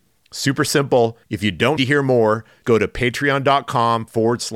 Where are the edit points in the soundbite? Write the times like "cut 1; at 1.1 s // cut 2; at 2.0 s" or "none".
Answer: cut 1; at 1.2 s // cut 2; at 1.8 s // cut 3; at 2.6 s